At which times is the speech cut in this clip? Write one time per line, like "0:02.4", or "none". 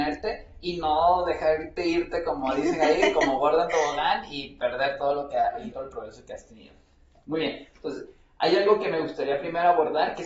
0:05.7